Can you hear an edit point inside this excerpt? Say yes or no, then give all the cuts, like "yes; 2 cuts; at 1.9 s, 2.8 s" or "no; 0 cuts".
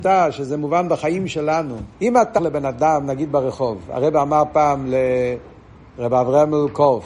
yes; 2 cuts; at 1.9 s, 2.4 s